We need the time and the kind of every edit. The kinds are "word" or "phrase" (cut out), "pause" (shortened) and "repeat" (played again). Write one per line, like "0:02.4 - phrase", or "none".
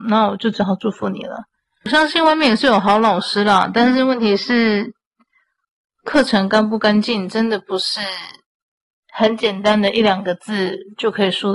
none

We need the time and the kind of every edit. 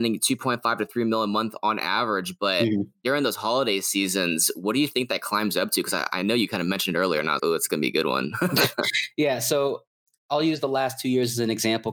0:07.4 - word

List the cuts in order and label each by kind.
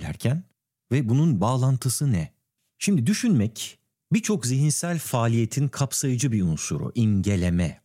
0:01.4 - word

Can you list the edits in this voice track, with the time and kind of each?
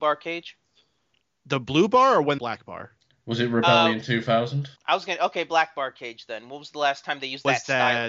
0:02.4 - phrase
0:04.8 - pause

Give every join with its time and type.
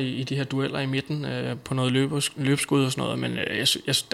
none

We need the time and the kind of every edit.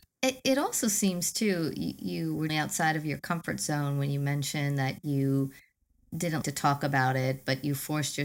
0:02.5 - word
0:06.4 - word

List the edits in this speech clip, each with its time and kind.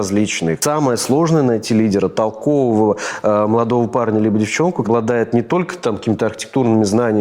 0:04.8 - word

